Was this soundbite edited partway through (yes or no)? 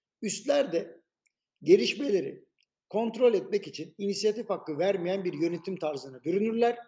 no